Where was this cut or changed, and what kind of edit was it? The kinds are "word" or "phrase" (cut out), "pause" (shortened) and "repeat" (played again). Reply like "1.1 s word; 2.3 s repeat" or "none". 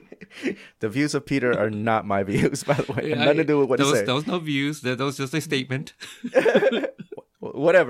none